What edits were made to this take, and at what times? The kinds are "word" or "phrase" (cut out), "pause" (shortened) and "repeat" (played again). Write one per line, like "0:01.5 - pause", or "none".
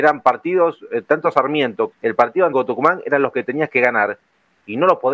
0:01.9 - word
0:02.5 - word
0:03.3 - word